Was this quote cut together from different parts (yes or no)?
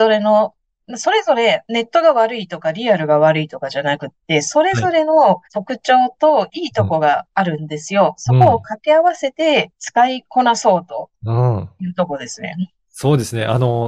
yes